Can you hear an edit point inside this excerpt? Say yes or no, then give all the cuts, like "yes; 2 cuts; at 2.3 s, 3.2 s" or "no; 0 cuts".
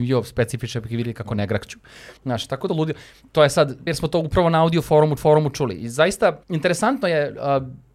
yes; 6 cuts; at 2.2 s, 2.7 s, 3.2 s, 3.9 s, 5.2 s, 6.4 s